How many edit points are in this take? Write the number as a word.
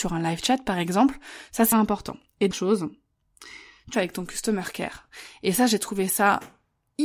three